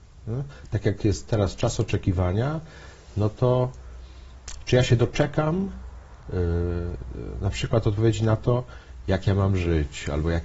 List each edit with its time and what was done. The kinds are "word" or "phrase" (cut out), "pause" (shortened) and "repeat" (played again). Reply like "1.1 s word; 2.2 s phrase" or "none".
6.2 s pause